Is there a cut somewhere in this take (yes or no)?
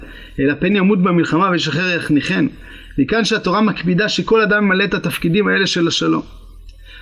no